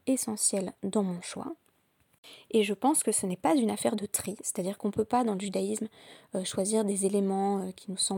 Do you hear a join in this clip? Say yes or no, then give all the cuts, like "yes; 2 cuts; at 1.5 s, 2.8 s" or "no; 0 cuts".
no; 0 cuts